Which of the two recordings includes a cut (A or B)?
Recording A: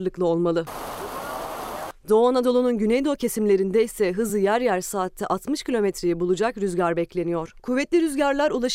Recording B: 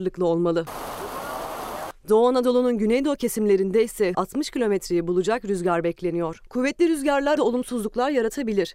B